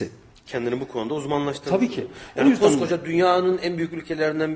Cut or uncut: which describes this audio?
uncut